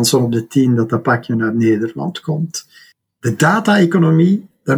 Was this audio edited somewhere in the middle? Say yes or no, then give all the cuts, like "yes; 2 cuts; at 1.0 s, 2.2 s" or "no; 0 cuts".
no; 0 cuts